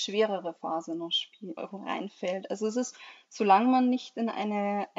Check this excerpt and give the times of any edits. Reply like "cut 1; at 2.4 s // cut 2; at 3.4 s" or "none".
cut 1; at 1.6 s

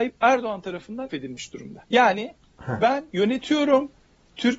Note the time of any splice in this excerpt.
cut 1; at 1.1 s // cut 2; at 1.9 s // cut 3; at 3.1 s

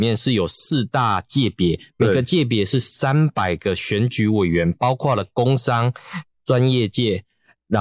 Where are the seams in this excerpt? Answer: cut 1; at 6.3 s

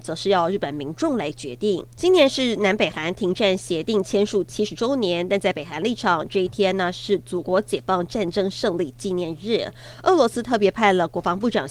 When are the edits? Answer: cut 1; at 1.9 s

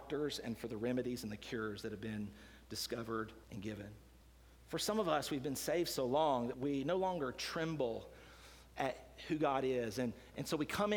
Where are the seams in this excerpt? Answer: cut 1; at 3.4 s // cut 2; at 4.2 s // cut 3; at 6.5 s

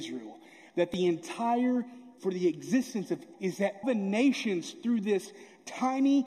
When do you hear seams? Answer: cut 1; at 2.2 s // cut 2; at 3.3 s // cut 3; at 3.8 s

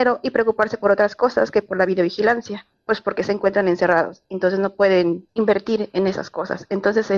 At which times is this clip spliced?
cut 1; at 5.3 s

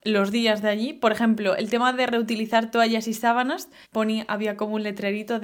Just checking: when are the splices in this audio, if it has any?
cut 1; at 3.8 s

